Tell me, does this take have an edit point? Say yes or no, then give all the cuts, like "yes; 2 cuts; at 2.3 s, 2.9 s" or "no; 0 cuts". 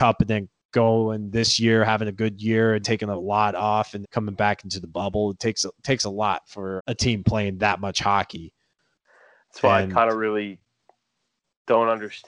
yes; 3 cuts; at 2.8 s, 4.0 s, 6.8 s